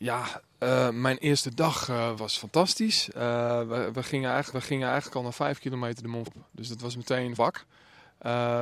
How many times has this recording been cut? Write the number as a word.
four